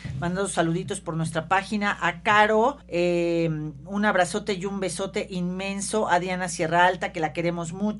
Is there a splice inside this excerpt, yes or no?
yes